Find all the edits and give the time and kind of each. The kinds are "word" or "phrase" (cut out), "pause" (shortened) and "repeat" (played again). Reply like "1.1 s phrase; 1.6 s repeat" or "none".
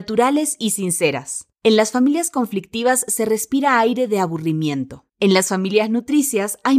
1.5 s pause; 5.1 s pause